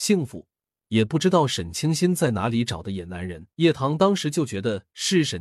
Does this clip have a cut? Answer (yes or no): yes